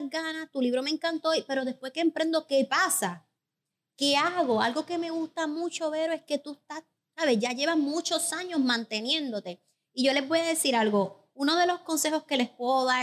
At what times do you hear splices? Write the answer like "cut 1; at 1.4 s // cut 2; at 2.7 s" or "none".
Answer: none

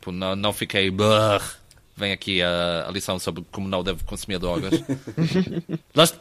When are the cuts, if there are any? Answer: none

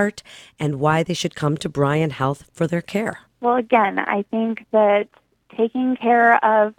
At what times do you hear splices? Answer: cut 1; at 3.3 s

